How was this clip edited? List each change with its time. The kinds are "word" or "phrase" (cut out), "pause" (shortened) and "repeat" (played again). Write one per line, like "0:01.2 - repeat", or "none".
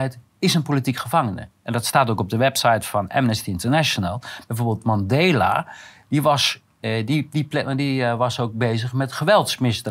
none